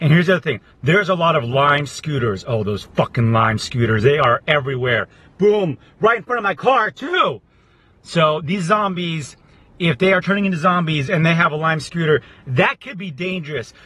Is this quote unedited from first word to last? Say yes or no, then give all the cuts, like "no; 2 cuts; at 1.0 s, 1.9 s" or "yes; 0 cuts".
yes; 0 cuts